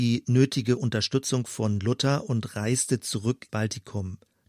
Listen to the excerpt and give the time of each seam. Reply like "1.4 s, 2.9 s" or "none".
3.5 s